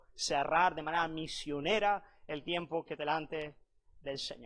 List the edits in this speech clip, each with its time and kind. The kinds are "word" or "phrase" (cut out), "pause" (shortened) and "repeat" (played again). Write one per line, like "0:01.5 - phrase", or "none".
0:03.0 - word

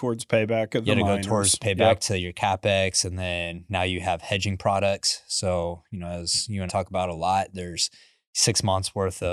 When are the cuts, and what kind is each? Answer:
0:06.7 - word

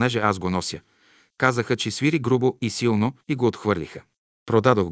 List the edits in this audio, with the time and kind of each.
0:03.2 - pause

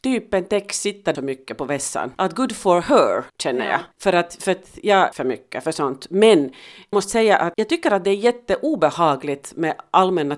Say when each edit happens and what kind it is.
0:01.1 - phrase
0:02.1 - pause
0:03.3 - pause
0:03.9 - pause
0:05.1 - word
0:06.9 - word
0:07.5 - word

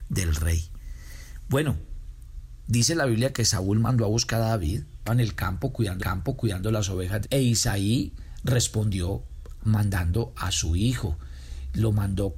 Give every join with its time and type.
0:05.1 - word
0:06.0 - repeat
0:07.2 - phrase
0:09.6 - word

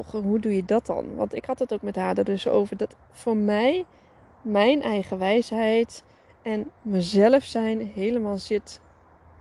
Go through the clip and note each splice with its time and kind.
none

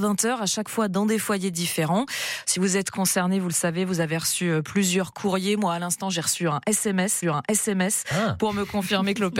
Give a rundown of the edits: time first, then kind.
0:07.2 - repeat

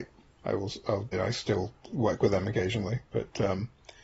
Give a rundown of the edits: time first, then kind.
0:01.1 - word

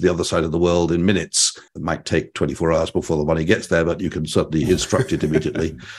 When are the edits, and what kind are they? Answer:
0:01.7 - pause

